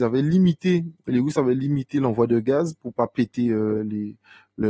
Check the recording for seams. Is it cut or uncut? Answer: uncut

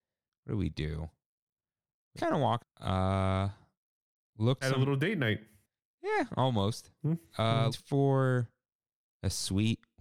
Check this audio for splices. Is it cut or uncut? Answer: cut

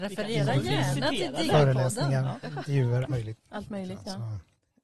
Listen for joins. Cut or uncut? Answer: cut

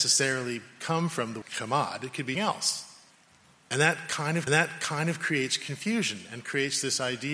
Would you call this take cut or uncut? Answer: cut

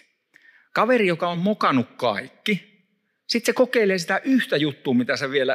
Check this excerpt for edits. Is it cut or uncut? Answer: uncut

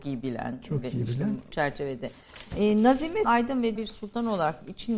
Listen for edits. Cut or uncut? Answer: cut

